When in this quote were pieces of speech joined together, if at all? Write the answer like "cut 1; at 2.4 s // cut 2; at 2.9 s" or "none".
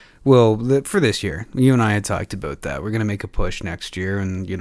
none